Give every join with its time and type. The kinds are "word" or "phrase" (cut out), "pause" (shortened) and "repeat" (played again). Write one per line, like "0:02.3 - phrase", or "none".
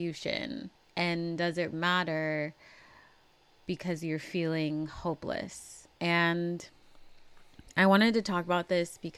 0:01.7 - word
0:05.9 - pause